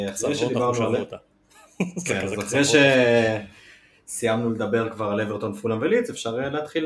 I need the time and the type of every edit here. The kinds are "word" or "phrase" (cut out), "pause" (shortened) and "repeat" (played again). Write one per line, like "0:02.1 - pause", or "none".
none